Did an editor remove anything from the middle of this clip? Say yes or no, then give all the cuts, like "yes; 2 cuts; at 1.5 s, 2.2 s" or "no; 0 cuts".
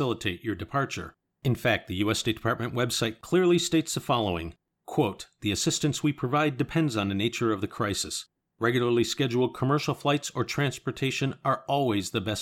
no; 0 cuts